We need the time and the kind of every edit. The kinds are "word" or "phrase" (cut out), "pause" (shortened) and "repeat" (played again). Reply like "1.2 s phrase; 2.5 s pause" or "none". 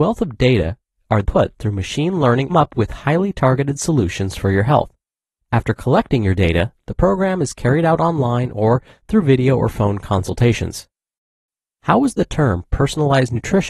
1.2 s word; 2.5 s phrase